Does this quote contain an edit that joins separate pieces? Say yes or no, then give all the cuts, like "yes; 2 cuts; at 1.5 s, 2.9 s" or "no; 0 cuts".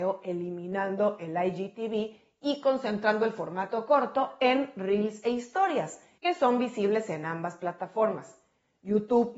no; 0 cuts